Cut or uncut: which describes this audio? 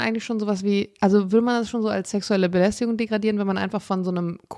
uncut